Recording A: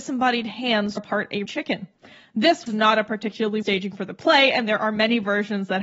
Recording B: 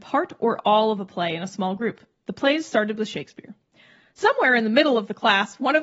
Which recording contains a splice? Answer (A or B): A